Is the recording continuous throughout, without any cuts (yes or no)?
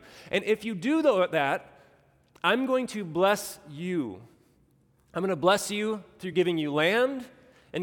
yes